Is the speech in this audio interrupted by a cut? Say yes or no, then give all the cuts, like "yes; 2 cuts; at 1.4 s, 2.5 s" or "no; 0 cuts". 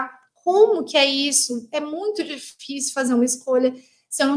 no; 0 cuts